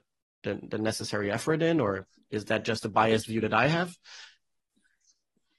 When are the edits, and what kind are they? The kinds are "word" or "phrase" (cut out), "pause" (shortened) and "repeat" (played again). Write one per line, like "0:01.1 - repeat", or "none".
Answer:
none

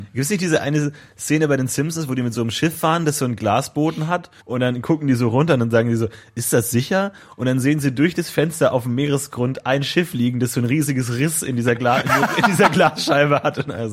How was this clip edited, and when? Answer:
0:04.4 - pause

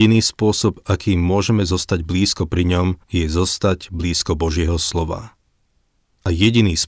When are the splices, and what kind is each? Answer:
0:03.0 - pause

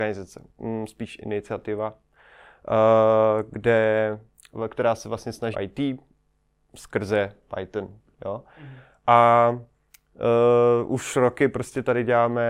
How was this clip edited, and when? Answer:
0:05.5 - phrase

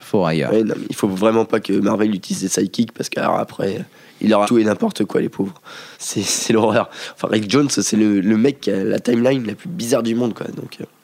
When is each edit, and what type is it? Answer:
0:04.4 - word
0:05.9 - pause

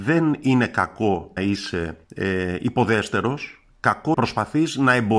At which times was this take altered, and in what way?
0:01.4 - word
0:02.0 - pause
0:04.1 - phrase

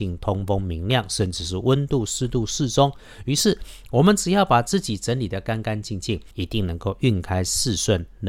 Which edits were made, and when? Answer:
0:06.3 - pause

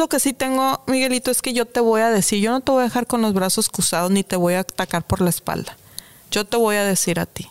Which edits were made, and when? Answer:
none

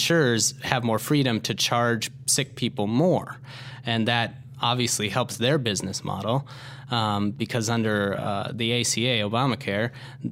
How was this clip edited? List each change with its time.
none

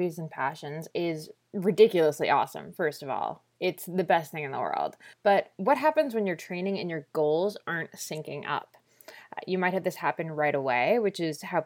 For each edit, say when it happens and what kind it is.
0:05.1 - pause

